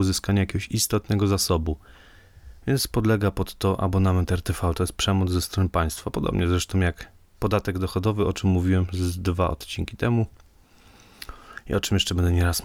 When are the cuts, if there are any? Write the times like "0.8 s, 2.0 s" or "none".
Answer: 7.3 s